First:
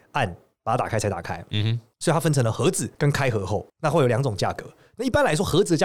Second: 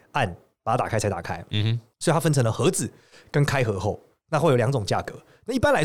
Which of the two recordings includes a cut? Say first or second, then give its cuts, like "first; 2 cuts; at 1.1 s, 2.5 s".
first; 2 cuts; at 2.9 s, 3.7 s